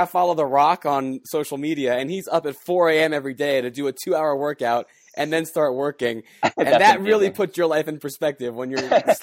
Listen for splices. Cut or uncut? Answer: uncut